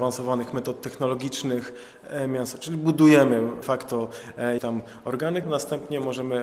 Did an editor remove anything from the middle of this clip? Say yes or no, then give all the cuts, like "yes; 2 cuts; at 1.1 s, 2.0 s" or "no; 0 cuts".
yes; 3 cuts; at 3.6 s, 4.6 s, 5.4 s